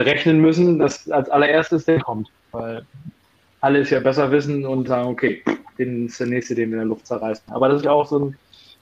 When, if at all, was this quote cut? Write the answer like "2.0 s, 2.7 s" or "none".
2.0 s, 4.9 s, 7.8 s